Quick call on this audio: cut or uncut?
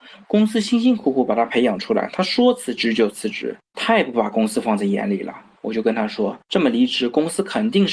cut